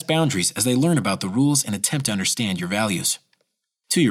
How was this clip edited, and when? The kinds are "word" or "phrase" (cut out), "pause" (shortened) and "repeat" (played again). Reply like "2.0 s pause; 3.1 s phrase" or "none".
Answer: none